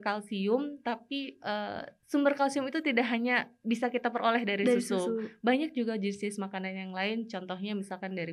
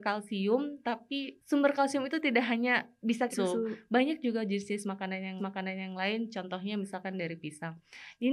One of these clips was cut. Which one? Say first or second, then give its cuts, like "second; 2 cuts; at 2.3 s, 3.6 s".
second; 3 cuts; at 1.4 s, 3.3 s, 5.4 s